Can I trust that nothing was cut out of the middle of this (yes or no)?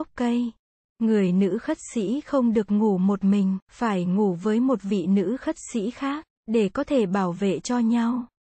no